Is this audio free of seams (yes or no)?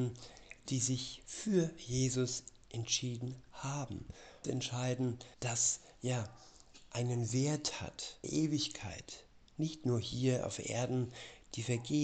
no